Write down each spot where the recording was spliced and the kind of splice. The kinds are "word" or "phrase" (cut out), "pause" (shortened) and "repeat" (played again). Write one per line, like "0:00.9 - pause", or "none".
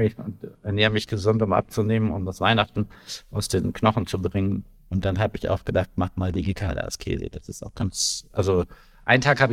none